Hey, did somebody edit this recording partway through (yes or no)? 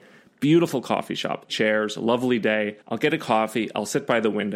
yes